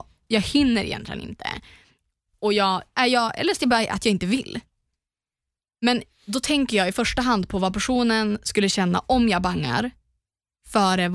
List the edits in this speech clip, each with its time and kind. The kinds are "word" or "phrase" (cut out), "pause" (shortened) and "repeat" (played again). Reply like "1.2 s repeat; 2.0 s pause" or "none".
none